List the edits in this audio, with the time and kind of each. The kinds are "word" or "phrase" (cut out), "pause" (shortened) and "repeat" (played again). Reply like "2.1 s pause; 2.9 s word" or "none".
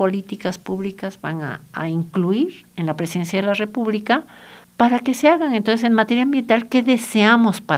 4.6 s pause